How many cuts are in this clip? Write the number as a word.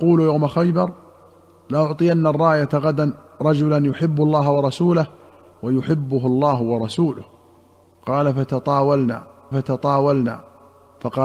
one